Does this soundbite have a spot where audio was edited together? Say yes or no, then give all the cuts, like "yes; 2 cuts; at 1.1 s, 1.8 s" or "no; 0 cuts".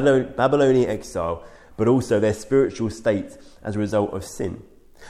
no; 0 cuts